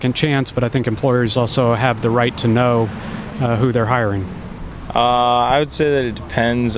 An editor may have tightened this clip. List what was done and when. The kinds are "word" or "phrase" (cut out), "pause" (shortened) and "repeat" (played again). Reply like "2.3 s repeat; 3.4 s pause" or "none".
none